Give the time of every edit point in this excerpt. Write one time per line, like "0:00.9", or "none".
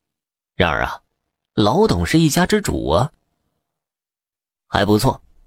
none